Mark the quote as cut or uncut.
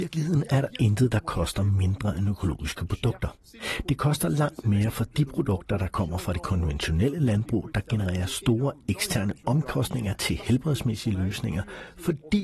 uncut